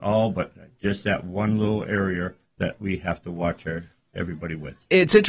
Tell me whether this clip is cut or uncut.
uncut